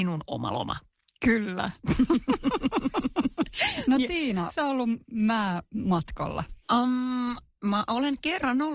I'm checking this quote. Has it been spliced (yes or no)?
yes